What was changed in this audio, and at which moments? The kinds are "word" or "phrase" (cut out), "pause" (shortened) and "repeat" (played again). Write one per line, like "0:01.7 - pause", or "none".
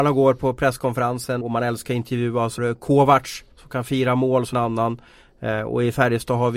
0:01.4 - word
0:02.6 - word
0:03.5 - pause
0:04.5 - word

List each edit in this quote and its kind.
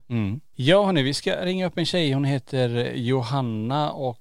none

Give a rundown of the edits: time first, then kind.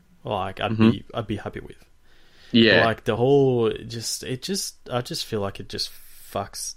none

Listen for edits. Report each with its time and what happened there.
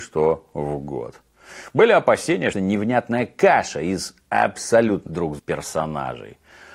0:02.5 - phrase
0:05.1 - word
0:05.4 - word

